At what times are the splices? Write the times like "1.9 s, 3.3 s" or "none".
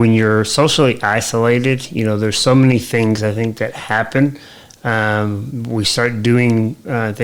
none

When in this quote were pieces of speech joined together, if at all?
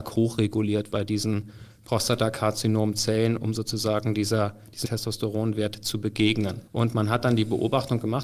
0.9 s, 4.8 s, 6.7 s

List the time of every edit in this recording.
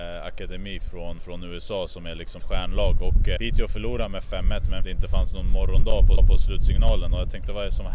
1.2 s, 2.4 s, 3.4 s, 4.8 s, 6.2 s

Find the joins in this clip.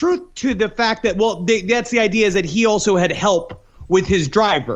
none

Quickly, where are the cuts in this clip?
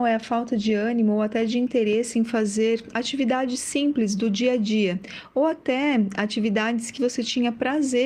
7.0 s

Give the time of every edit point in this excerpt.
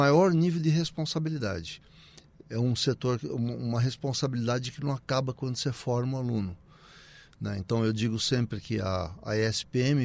none

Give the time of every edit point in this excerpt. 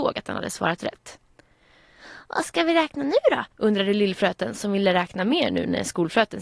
3.5 s

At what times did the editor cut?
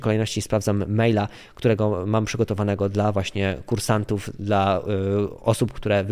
none

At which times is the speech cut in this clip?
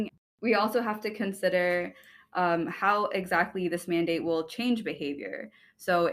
none

